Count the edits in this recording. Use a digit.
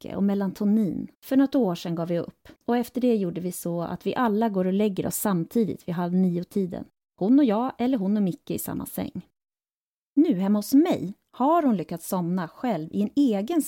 2